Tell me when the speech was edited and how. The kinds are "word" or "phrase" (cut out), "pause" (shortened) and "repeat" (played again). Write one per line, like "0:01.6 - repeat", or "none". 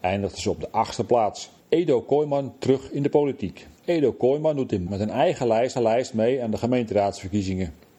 0:01.6 - pause
0:03.8 - pause
0:04.9 - word
0:05.8 - repeat